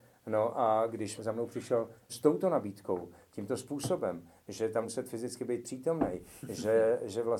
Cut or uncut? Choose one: cut